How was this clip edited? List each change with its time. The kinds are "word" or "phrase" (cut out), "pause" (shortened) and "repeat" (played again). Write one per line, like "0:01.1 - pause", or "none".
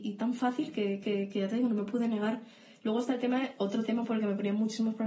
0:01.0 - repeat